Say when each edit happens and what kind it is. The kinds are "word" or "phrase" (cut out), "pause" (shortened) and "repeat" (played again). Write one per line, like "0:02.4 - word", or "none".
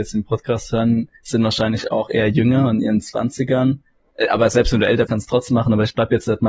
0:01.1 - pause
0:05.1 - word